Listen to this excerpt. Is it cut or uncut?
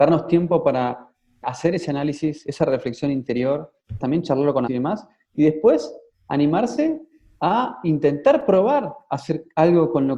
cut